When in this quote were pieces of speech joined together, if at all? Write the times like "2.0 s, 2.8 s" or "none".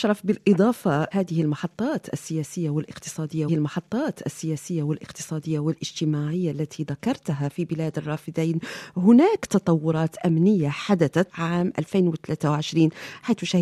1.1 s, 3.5 s, 11.3 s